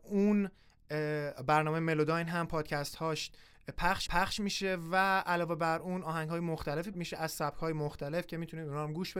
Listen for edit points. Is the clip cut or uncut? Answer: cut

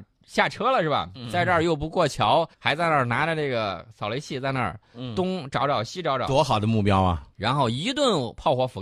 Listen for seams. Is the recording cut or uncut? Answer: cut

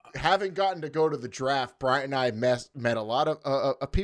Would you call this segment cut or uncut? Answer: uncut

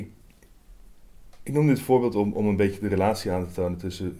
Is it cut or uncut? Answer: uncut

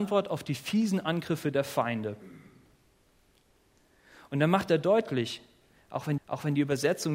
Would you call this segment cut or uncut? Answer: cut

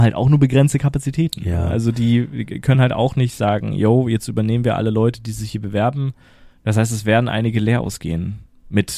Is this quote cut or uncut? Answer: uncut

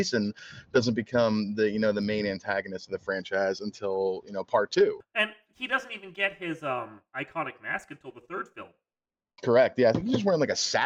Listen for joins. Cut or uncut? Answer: uncut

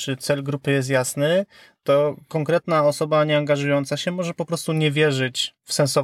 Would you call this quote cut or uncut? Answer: uncut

